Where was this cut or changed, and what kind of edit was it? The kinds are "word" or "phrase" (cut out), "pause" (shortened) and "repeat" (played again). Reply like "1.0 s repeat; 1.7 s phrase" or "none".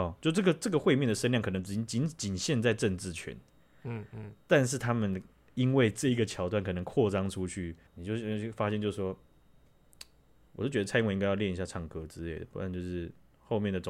7.9 s word